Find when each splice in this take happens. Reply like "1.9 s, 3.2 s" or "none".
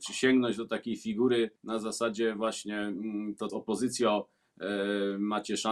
1.6 s, 3.5 s